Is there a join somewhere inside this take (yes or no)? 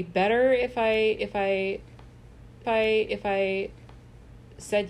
yes